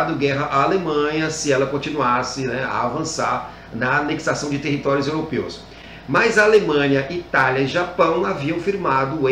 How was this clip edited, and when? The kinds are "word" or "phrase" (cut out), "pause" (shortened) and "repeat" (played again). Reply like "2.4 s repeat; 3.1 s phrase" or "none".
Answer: none

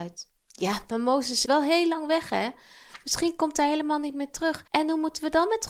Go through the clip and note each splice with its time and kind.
1.5 s word; 4.7 s pause

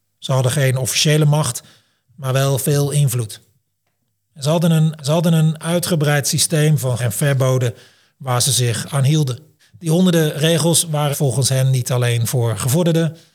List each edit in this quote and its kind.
5.0 s repeat; 7.0 s word; 9.6 s pause; 11.1 s word

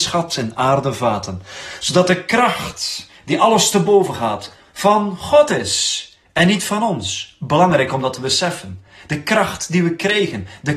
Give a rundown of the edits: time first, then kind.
none

